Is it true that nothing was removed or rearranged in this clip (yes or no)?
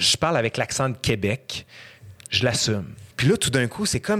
no